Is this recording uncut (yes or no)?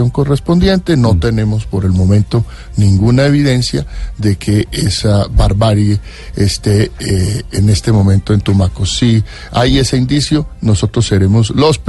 yes